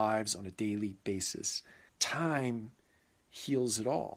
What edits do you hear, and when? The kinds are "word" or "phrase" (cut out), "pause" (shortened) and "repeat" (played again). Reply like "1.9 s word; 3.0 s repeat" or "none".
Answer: 1.9 s word